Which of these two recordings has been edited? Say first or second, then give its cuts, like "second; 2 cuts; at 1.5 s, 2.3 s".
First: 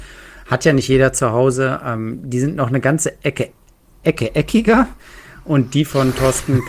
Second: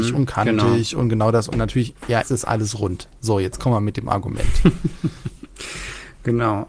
second; 1 cut; at 2.2 s